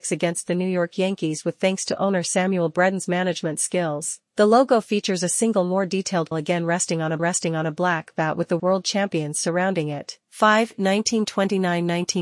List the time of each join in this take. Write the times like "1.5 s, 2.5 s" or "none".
4.3 s, 6.3 s, 7.2 s, 8.6 s, 10.2 s

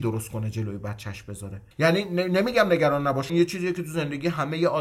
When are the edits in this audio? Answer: 1.7 s, 3.3 s

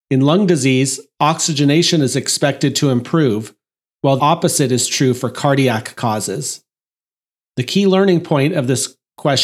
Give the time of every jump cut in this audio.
4.2 s

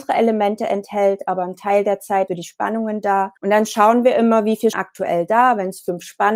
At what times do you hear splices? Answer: 2.3 s, 3.4 s, 4.7 s

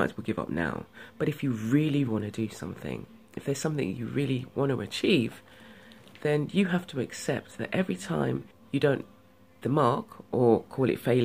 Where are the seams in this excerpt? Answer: 2.1 s, 8.5 s, 9.6 s

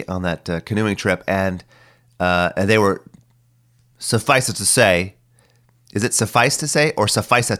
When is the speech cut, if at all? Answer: none

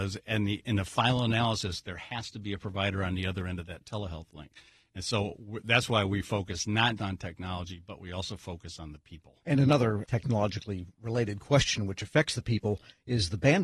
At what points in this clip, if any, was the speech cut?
7.0 s

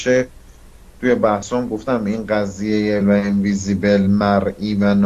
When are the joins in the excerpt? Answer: 3.0 s

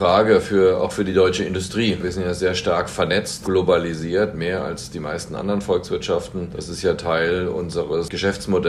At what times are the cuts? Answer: none

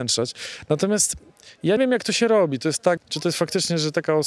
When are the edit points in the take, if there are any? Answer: 1.8 s, 3.0 s

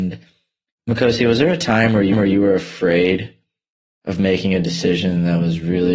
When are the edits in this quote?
2.1 s

